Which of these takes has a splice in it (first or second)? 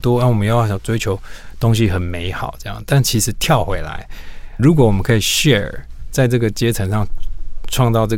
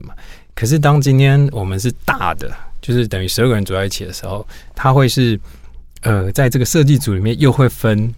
first